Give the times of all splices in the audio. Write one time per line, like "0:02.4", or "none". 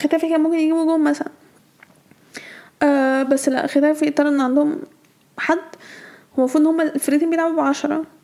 none